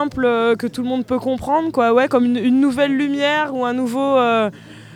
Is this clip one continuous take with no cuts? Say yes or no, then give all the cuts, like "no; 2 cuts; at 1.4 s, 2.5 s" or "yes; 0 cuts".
yes; 0 cuts